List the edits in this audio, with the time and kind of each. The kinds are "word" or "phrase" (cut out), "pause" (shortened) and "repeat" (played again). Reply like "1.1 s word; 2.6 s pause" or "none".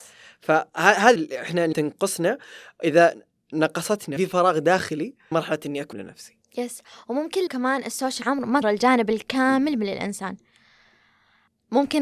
1.2 s word; 1.7 s word; 4.2 s word; 5.3 s word; 5.9 s word; 7.5 s word; 8.2 s word; 8.6 s word